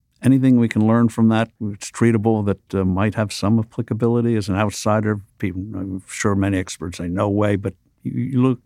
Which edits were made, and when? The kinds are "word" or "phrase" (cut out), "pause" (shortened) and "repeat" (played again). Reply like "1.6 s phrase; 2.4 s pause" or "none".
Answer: 1.6 s pause; 5.3 s pause